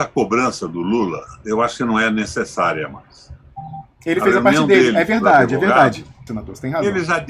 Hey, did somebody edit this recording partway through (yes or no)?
yes